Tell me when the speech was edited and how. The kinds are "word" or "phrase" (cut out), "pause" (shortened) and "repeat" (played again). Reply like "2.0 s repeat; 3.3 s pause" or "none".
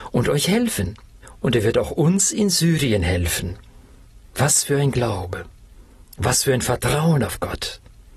none